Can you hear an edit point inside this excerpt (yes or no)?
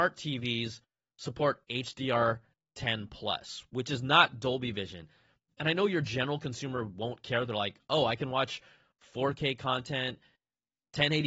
no